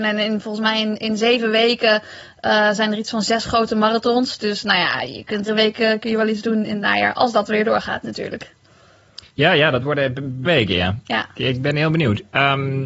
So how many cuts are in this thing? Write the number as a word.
two